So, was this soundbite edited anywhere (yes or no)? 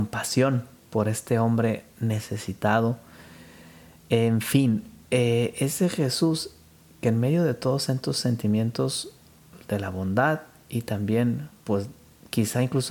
no